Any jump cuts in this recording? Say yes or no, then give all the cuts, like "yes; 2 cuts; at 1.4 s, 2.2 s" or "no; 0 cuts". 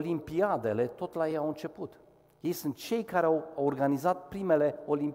no; 0 cuts